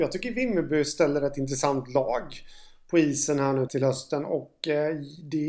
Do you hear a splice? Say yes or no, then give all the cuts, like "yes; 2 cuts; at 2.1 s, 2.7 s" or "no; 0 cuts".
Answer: yes; 1 cut; at 3.7 s